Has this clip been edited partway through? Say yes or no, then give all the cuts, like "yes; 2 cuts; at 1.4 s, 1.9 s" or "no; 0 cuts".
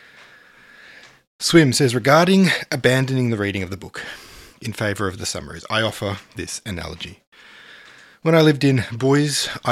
no; 0 cuts